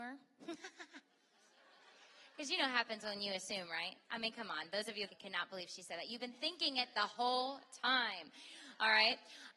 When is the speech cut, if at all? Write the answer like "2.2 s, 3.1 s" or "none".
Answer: 5.1 s